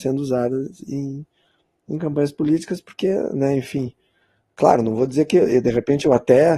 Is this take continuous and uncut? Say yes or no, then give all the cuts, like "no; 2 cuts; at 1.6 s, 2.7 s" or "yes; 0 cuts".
yes; 0 cuts